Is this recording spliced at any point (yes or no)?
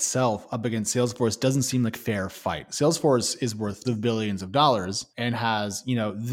yes